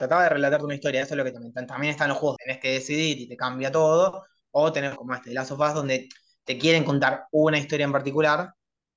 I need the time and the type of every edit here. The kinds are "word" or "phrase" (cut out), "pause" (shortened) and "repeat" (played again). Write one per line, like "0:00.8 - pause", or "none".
0:01.3 - word
0:02.4 - word
0:05.0 - word